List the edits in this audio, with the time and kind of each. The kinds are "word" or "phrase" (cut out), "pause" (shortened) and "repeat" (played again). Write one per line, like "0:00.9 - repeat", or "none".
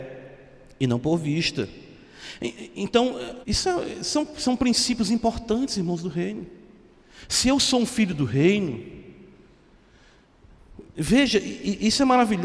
0:03.4 - pause